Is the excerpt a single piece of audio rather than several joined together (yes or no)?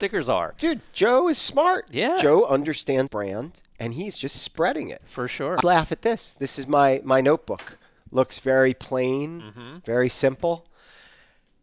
no